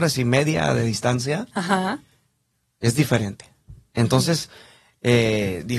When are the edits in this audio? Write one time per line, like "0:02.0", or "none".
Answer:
none